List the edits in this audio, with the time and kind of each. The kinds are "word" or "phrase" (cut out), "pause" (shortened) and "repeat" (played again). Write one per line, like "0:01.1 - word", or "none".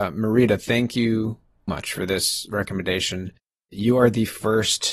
0:01.7 - word